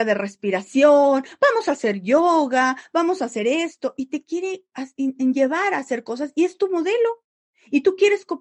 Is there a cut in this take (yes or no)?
no